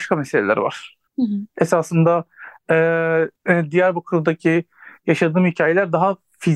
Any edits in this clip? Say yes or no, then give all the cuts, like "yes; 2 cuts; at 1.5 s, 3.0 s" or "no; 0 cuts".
yes; 2 cuts; at 1.1 s, 3.3 s